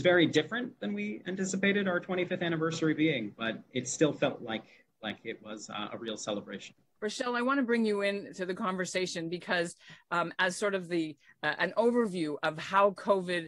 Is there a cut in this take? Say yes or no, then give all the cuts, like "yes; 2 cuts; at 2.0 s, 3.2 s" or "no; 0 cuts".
no; 0 cuts